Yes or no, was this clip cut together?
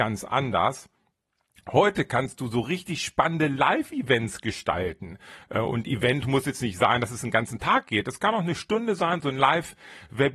no